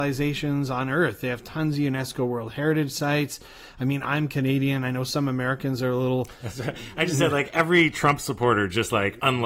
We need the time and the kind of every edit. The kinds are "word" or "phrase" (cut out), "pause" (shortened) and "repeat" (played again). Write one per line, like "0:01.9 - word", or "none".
none